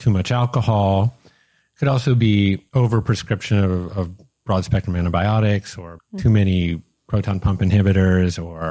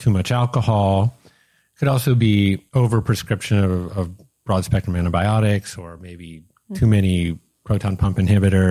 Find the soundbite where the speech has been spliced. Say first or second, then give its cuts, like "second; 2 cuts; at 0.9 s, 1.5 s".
first; 1 cut; at 6.0 s